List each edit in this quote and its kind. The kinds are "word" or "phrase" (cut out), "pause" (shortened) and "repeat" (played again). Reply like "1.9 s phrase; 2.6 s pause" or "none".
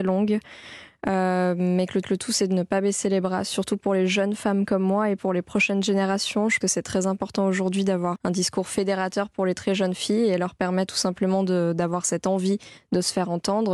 2.0 s repeat; 6.6 s word; 8.2 s word